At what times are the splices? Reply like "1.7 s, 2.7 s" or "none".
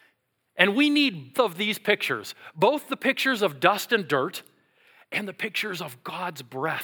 1.3 s